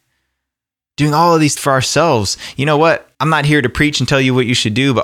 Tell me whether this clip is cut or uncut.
cut